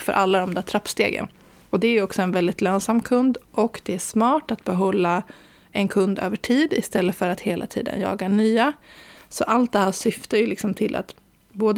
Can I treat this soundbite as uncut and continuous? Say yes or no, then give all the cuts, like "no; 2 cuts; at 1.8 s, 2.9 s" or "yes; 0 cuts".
yes; 0 cuts